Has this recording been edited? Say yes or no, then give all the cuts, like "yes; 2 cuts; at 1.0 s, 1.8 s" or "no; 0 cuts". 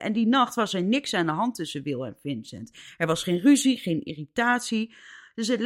no; 0 cuts